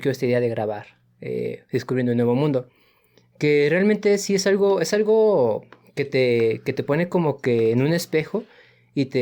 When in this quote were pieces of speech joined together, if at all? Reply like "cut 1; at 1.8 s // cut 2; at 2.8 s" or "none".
none